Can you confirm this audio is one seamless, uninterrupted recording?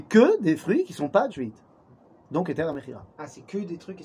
no; 1 cut; at 1.3 s

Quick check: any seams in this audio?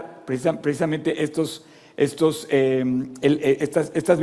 no; 0 cuts

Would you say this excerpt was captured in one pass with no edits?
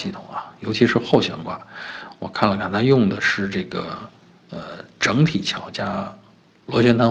yes; 0 cuts

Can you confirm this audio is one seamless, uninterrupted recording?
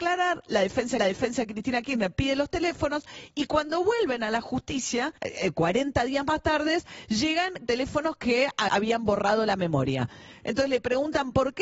no; 4 cuts; at 1.0 s, 5.2 s, 7.7 s, 8.7 s

